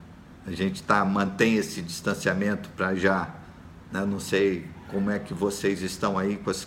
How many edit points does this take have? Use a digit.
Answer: 0